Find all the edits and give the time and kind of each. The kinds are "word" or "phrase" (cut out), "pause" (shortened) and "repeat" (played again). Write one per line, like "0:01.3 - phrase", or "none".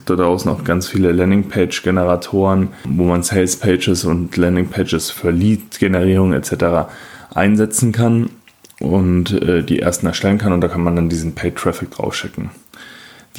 none